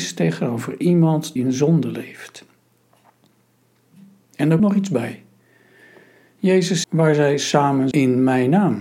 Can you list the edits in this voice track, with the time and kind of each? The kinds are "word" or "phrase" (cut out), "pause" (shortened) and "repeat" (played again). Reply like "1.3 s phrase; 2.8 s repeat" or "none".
1.4 s word; 4.6 s word; 6.8 s word; 7.9 s word